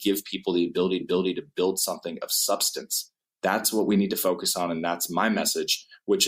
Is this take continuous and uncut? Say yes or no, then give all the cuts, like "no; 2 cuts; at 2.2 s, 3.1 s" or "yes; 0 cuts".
no; 1 cut; at 1.0 s